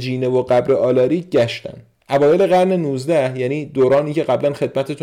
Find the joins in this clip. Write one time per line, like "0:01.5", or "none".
none